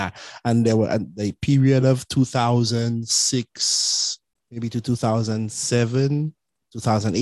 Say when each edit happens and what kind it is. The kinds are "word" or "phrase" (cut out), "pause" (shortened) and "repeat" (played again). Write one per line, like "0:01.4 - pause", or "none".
none